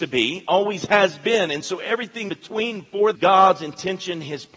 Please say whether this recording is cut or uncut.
cut